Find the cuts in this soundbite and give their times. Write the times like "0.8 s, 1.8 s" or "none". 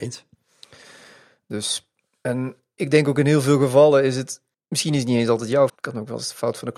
4.5 s, 5.7 s